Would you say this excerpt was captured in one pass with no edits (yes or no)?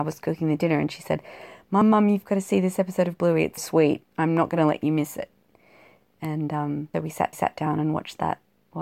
no